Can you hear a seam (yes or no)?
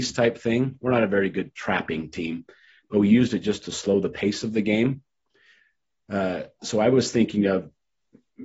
no